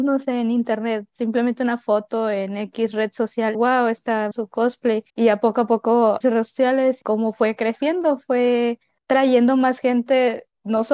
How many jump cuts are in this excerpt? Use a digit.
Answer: 6